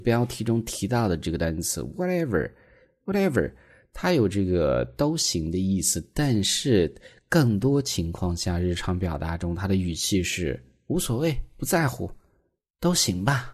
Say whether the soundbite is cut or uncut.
uncut